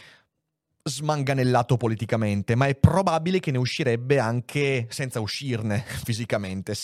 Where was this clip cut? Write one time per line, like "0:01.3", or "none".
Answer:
none